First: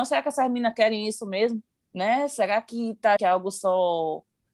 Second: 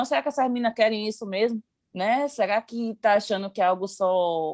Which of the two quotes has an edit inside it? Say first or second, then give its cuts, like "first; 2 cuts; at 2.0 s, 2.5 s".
first; 1 cut; at 3.2 s